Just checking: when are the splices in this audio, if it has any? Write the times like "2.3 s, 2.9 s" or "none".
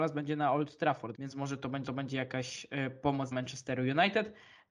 1.1 s, 1.9 s, 3.3 s